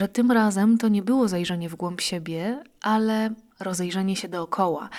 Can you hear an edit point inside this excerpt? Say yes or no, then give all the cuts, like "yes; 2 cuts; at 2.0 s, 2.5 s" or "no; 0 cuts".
no; 0 cuts